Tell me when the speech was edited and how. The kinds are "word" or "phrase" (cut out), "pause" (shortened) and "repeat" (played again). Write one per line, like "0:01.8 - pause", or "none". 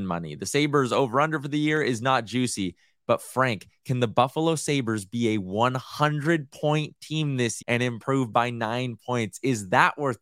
0:07.6 - word